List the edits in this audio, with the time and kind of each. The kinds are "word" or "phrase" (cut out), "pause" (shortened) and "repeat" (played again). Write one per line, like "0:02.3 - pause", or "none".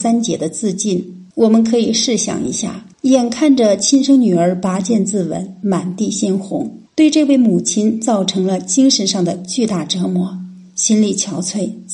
0:01.3 - pause
0:02.9 - pause
0:06.9 - pause